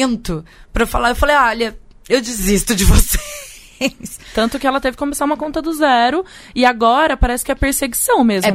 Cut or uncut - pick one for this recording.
uncut